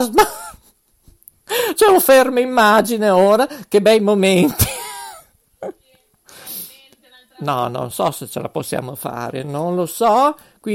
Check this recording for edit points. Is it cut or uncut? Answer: uncut